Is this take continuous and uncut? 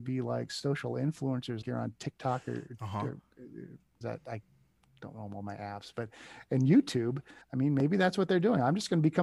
no; 3 cuts; at 1.6 s, 4.0 s, 7.4 s

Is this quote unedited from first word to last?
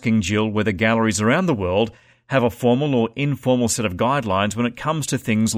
yes; 0 cuts

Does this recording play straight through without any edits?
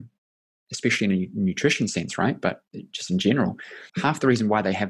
no; 1 cut; at 3.9 s

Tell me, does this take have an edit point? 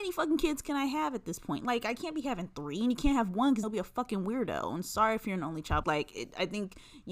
yes; 2 cuts; at 3.6 s, 5.8 s

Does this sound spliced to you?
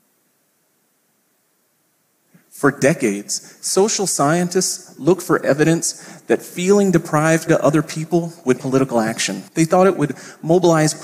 yes; 3 cuts; at 7.5 s, 8.6 s, 9.5 s

